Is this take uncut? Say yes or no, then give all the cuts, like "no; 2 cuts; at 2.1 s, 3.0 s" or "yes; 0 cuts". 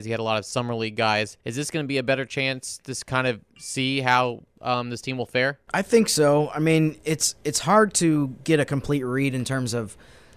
no; 3 cuts; at 1.4 s, 3.5 s, 4.5 s